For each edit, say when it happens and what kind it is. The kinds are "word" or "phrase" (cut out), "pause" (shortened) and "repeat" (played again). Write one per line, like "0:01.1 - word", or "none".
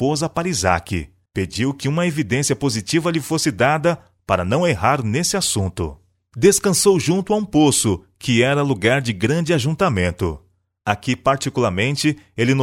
0:01.3 - pause